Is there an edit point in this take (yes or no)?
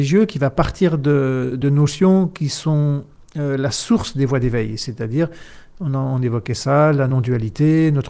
no